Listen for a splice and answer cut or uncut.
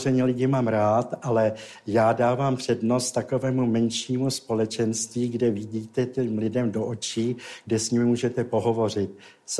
uncut